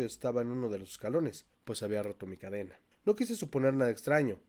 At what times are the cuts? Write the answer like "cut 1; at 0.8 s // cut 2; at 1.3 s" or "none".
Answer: cut 1; at 1.5 s // cut 2; at 2.9 s